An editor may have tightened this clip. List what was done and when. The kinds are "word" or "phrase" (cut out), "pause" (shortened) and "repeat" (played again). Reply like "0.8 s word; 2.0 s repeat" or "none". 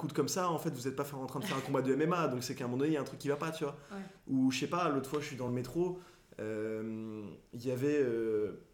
none